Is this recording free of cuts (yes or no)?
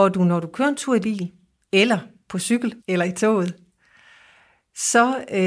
no